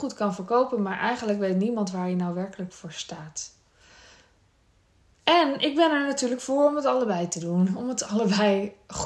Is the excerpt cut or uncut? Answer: uncut